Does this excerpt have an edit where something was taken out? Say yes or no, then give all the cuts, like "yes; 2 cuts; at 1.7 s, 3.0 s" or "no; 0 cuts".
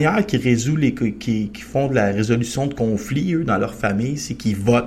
no; 0 cuts